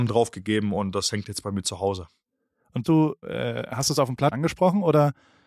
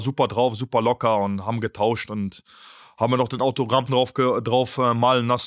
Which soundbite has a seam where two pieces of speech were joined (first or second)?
first